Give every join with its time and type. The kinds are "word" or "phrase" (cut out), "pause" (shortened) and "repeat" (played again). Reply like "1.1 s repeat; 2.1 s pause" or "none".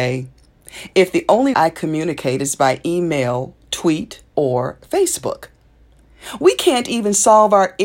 1.5 s word; 4.3 s word